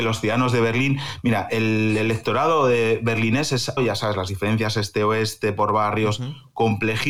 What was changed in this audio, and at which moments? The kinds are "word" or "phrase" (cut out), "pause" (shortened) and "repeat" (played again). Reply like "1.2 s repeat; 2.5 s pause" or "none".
3.8 s phrase